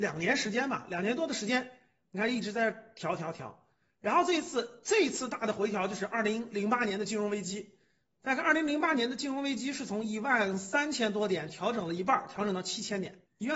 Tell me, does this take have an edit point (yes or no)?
no